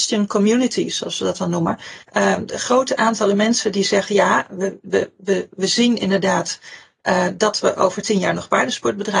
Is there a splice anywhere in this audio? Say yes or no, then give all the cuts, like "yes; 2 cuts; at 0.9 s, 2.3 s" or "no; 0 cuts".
yes; 1 cut; at 2.0 s